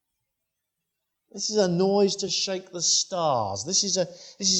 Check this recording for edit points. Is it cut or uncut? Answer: uncut